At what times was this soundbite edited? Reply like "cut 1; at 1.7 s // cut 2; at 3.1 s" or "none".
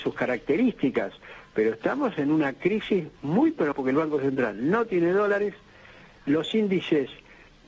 cut 1; at 3.7 s